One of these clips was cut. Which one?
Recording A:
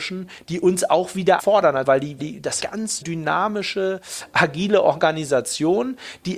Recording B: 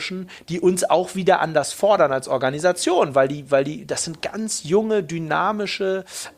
A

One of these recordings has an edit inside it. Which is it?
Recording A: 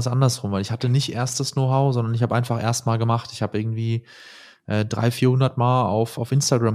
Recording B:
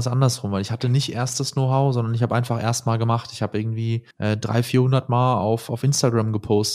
B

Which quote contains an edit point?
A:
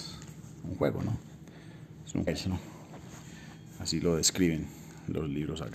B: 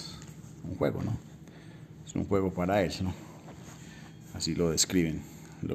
A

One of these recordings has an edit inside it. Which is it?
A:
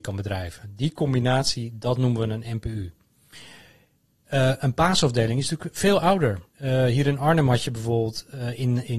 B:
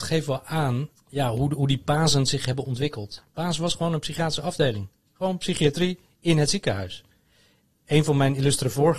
A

